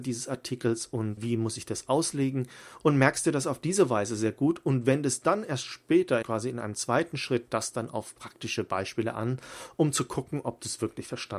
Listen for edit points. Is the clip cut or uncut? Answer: cut